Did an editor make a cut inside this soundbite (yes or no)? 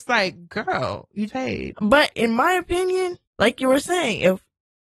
yes